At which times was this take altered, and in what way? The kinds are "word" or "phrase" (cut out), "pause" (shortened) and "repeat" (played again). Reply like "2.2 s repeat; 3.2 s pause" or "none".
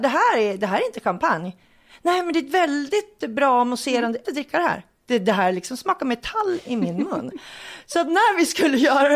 4.2 s phrase